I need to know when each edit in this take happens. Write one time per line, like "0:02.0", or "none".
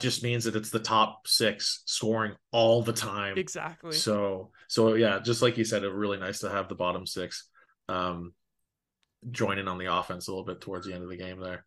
none